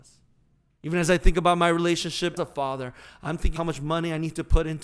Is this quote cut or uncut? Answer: cut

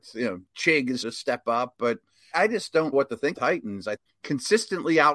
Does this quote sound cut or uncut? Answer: cut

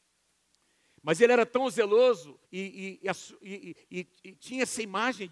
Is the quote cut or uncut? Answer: cut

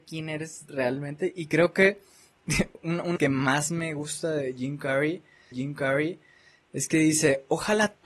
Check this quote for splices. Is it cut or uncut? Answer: cut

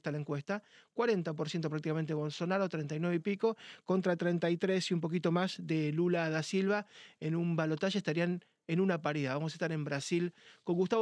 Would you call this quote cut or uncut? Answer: uncut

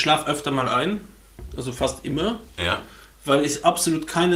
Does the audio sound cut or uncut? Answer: uncut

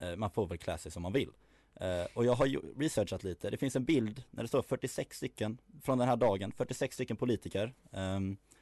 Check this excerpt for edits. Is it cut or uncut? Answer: uncut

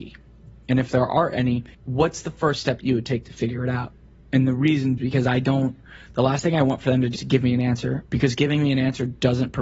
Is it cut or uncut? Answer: cut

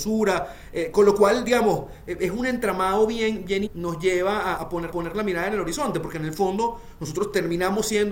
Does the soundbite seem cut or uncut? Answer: cut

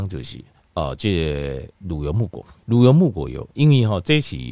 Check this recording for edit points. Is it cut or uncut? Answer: cut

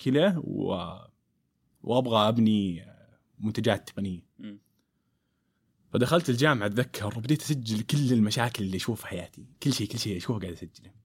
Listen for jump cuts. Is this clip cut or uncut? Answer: uncut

